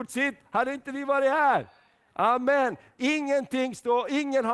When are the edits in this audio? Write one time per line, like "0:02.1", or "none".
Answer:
none